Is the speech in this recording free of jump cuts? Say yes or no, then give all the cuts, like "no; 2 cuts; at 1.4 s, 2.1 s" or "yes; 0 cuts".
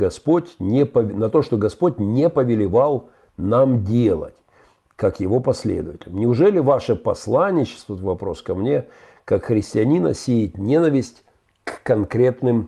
yes; 0 cuts